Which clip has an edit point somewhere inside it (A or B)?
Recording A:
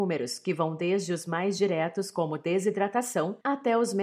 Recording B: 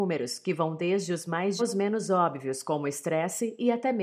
B